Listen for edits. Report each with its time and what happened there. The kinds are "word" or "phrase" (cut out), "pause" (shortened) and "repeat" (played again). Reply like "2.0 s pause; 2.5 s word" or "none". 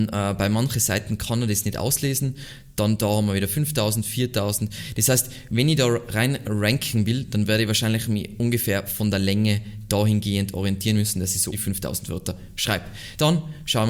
11.5 s word